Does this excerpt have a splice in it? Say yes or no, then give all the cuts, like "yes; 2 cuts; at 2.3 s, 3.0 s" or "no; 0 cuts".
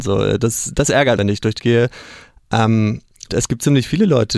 yes; 3 cuts; at 1.2 s, 1.6 s, 3.3 s